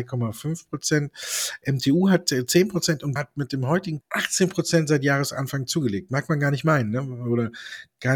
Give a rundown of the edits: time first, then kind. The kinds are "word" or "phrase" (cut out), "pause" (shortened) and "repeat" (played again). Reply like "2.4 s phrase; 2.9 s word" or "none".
3.2 s word; 4.0 s word